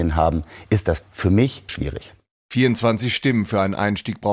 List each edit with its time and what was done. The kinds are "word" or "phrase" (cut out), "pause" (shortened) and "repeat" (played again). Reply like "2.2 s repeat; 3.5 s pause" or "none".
1.0 s word; 1.7 s word